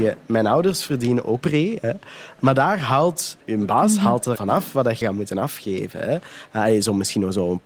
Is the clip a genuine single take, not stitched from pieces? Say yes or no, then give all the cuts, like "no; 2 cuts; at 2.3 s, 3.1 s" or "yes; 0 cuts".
no; 4 cuts; at 1.4 s, 3.4 s, 4.4 s, 5.0 s